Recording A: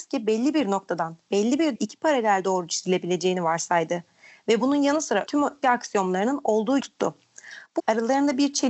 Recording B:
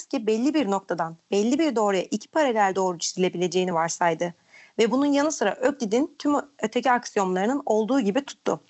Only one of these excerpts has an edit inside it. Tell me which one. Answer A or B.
A